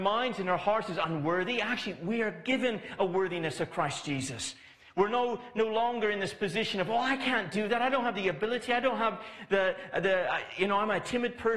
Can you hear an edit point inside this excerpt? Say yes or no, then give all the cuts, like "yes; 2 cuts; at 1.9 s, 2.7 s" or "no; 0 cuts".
no; 0 cuts